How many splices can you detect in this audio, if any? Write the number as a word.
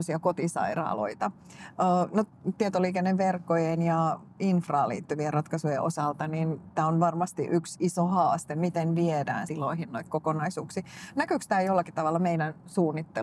one